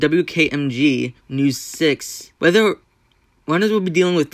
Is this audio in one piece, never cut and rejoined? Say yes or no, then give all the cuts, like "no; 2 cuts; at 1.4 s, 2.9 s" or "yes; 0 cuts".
no; 2 cuts; at 1.2 s, 2.4 s